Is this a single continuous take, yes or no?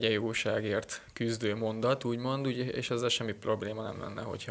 yes